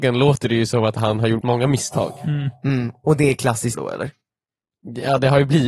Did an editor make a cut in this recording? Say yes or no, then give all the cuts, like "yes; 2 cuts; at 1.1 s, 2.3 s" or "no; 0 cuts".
yes; 2 cuts; at 1.4 s, 3.7 s